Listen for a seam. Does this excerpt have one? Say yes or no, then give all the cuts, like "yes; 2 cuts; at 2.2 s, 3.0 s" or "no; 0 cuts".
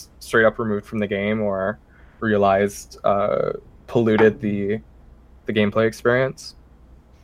no; 0 cuts